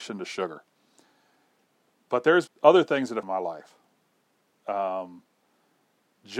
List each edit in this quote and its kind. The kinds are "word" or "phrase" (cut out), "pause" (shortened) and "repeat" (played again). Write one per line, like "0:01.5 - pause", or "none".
0:02.5 - word
0:03.2 - word